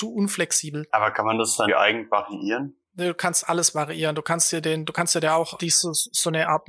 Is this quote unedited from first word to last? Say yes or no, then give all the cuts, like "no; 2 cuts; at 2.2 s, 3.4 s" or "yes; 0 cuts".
no; 2 cuts; at 1.7 s, 4.6 s